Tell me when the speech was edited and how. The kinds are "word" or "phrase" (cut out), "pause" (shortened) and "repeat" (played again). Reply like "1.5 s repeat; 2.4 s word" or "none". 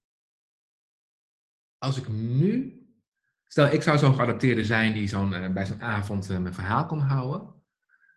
none